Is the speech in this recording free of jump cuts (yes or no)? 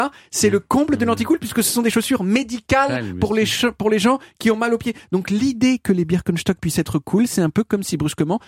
yes